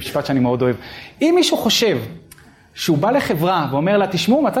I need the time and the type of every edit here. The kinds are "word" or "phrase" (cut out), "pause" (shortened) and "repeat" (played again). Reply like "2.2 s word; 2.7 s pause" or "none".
none